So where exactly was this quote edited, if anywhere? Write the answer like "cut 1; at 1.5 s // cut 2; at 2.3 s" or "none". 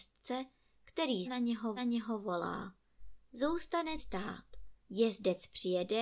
cut 1; at 1.2 s // cut 2; at 1.8 s // cut 3; at 4.0 s // cut 4; at 4.8 s